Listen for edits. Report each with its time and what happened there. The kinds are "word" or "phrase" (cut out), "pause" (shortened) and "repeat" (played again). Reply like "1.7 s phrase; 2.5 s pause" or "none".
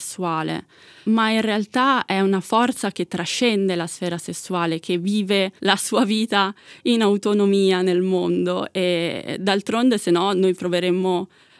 5.6 s pause